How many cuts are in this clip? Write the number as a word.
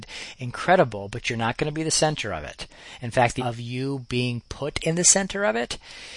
one